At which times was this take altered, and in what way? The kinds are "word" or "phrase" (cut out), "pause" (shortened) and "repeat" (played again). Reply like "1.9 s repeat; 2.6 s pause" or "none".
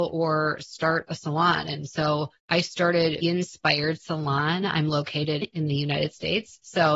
2.4 s pause; 3.2 s word; 5.4 s phrase